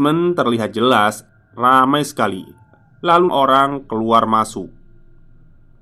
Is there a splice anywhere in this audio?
yes; 1 cut; at 3.3 s

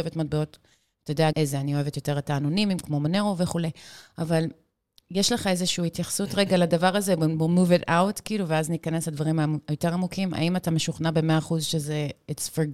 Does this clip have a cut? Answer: yes; 1 cut; at 1.3 s

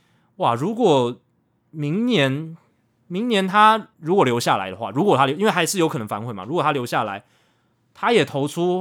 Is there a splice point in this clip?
yes; 1 cut; at 3.9 s

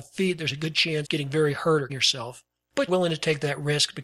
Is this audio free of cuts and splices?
no; 3 cuts; at 1.0 s, 1.9 s, 2.9 s

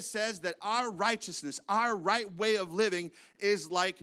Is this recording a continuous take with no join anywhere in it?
yes; 0 cuts

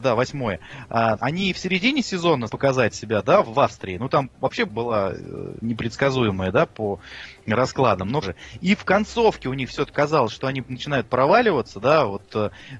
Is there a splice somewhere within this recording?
yes; 6 cuts; at 1.2 s, 2.5 s, 3.4 s, 4.7 s, 8.2 s, 9.9 s

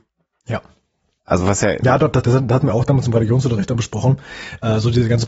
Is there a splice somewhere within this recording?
yes; 1 cut; at 2.2 s

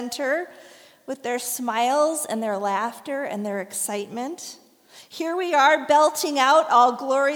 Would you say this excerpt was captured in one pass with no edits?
yes; 0 cuts

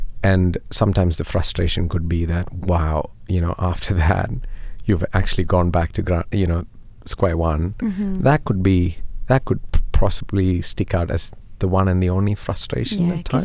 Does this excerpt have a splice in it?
no; 0 cuts

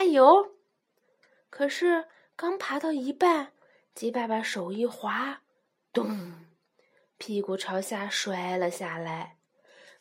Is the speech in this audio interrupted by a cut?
no; 0 cuts

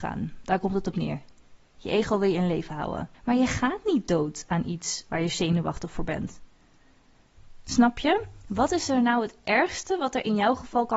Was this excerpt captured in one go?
no; 2 cuts; at 3.1 s, 5.1 s

